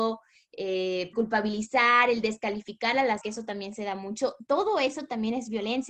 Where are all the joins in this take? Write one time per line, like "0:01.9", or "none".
0:01.1
0:03.2